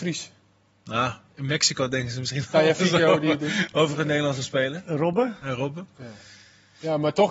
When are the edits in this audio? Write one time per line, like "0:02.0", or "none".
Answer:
none